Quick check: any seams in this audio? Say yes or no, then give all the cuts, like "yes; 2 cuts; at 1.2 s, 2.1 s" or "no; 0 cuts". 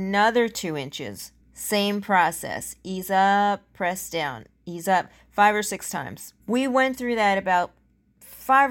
yes; 2 cuts; at 1.4 s, 6.4 s